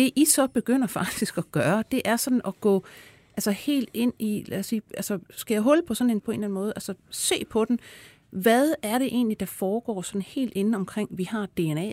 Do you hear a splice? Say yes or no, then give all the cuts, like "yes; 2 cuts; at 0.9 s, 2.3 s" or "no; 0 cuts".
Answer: yes; 1 cut; at 6.2 s